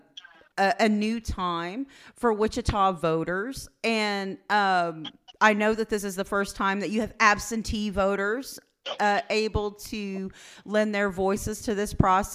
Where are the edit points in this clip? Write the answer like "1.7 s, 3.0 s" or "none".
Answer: none